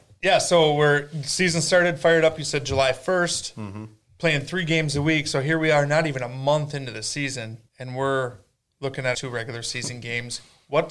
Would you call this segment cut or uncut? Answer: cut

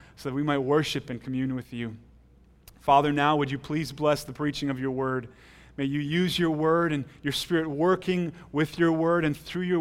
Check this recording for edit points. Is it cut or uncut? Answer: uncut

